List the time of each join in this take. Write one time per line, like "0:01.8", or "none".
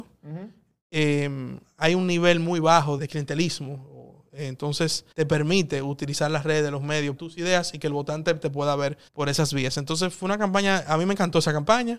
0:03.0
0:05.1
0:07.2
0:09.1